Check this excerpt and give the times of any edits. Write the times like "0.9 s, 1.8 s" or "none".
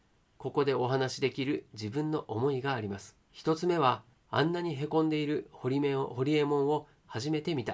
3.2 s, 4.1 s